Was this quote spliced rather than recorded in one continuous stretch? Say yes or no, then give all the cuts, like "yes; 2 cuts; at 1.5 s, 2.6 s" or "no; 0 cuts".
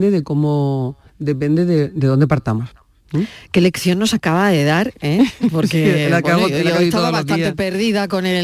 yes; 1 cut; at 1.1 s